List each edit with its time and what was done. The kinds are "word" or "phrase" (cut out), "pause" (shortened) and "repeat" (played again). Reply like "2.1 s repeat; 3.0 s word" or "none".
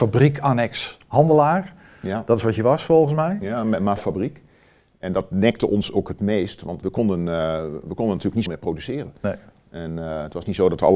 4.0 s word; 6.8 s word; 8.5 s word